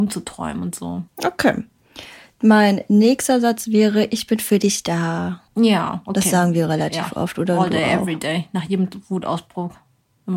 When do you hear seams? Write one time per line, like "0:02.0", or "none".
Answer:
0:01.1
0:05.5